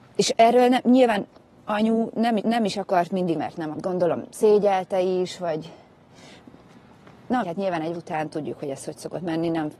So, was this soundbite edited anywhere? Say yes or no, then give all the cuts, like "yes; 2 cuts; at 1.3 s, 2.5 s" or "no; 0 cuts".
yes; 5 cuts; at 2.4 s, 3.3 s, 3.7 s, 7.4 s, 7.9 s